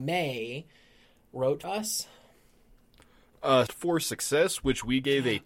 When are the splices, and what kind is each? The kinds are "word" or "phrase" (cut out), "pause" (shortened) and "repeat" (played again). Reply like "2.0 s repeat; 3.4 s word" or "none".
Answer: 1.6 s word; 3.7 s word